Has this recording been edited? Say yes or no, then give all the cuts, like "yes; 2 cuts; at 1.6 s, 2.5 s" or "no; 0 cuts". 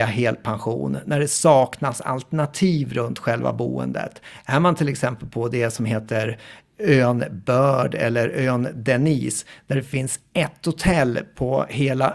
no; 0 cuts